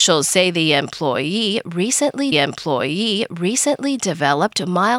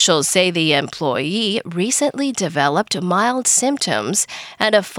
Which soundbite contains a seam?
first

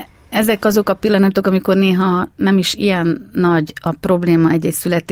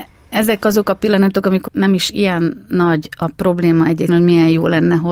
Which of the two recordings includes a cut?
second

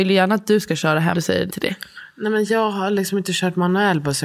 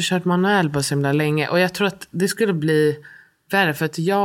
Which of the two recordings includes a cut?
first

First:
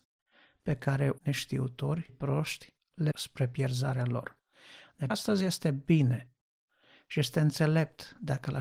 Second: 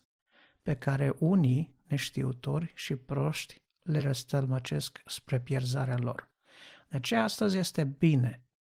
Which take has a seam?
first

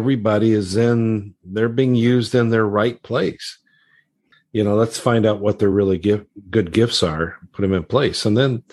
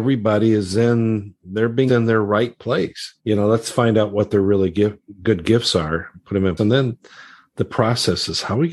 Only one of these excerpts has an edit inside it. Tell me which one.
second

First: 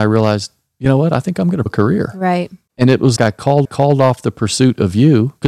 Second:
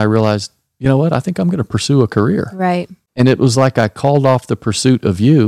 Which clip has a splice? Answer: first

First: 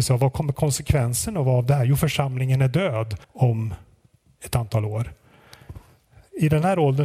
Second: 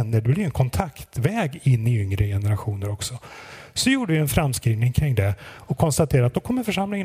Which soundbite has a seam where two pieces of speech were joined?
first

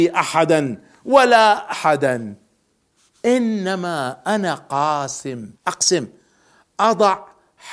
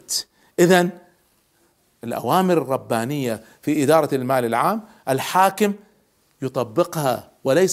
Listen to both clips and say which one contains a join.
first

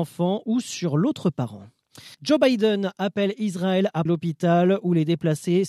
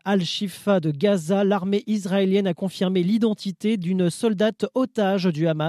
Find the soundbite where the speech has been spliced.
first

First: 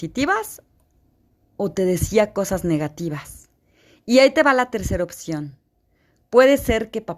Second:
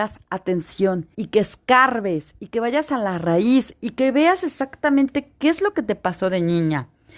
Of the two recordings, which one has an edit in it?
second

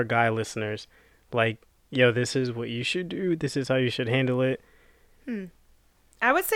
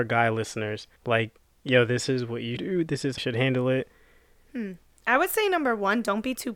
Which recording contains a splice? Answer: second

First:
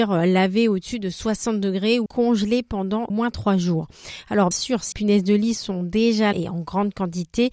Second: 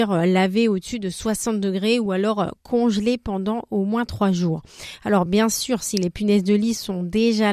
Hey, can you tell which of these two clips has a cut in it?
first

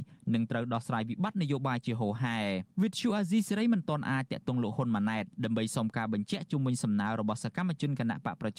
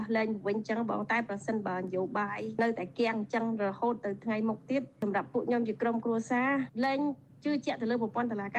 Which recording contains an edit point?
first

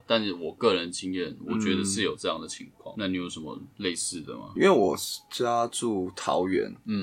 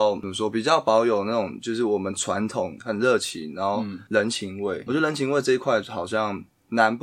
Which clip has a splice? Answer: second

